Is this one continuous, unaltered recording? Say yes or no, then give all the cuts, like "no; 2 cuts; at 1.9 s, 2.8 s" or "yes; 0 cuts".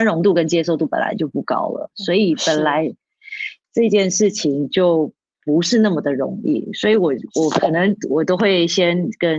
yes; 0 cuts